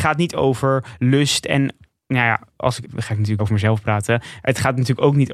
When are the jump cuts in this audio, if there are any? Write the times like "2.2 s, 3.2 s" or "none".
2.8 s, 3.4 s